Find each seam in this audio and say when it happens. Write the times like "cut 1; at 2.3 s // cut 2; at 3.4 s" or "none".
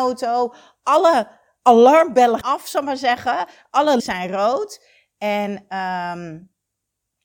cut 1; at 2.4 s // cut 2; at 4.0 s